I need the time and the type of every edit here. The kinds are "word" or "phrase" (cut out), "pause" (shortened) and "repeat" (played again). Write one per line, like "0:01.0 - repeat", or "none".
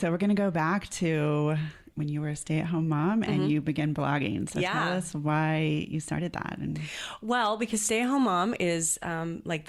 none

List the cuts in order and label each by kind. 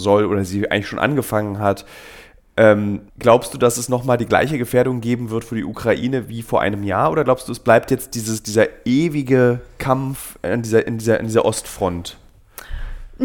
0:03.1 - pause

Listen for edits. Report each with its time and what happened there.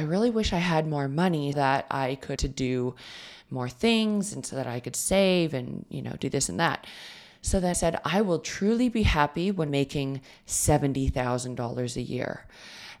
0:01.5 - word
0:02.4 - word
0:07.7 - word
0:09.7 - word

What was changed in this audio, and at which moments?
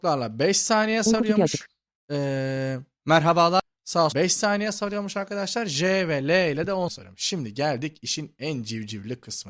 0:01.9 - pause
0:04.1 - word
0:06.9 - word

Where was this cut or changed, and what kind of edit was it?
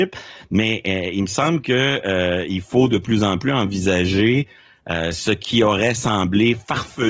none

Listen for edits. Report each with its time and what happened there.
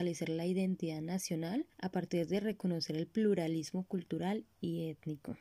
0:01.7 - pause

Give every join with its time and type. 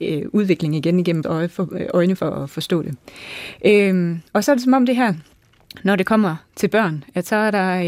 0:01.2 - word
0:04.3 - pause

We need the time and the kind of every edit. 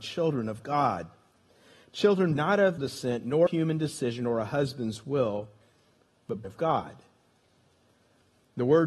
0:02.4 - word
0:02.8 - word
0:03.5 - word
0:06.4 - word

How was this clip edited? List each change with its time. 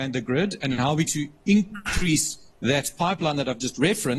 0:01.1 - word
0:02.5 - pause

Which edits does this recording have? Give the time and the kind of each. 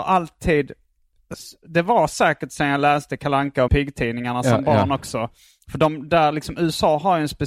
0:03.7 - word

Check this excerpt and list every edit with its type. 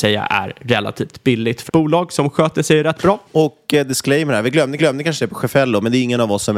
0:01.7 - phrase
0:03.2 - pause
0:04.8 - repeat

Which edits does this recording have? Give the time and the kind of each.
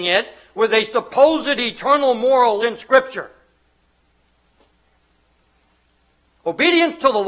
0:02.6 - phrase

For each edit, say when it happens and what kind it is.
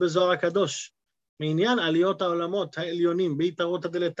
none

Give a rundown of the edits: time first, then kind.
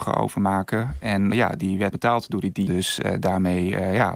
0:01.3 - word
0:01.9 - word
0:02.7 - phrase

